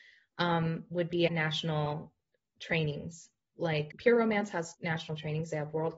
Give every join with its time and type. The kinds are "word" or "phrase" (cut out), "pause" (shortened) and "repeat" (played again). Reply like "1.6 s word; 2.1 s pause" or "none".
1.3 s word; 3.9 s word; 4.7 s word